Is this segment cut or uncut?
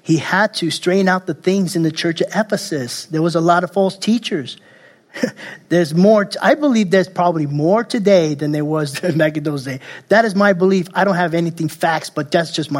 uncut